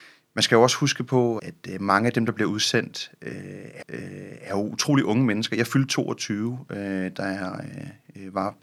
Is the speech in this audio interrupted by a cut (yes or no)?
yes